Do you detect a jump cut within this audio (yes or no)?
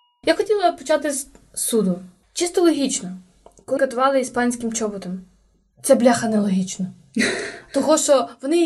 yes